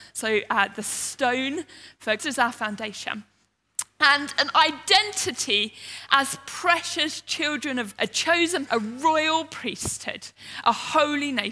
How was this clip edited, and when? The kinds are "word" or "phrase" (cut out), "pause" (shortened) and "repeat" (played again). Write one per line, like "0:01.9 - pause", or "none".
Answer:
0:02.2 - word
0:08.0 - word
0:08.7 - word